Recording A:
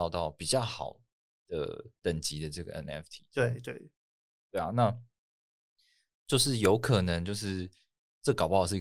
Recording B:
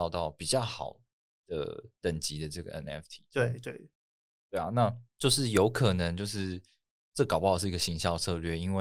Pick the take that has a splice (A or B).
B